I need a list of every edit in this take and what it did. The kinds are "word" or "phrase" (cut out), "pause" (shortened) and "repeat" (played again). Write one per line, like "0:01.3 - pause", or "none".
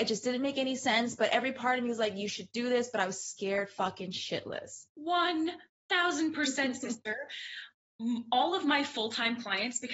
0:04.9 - pause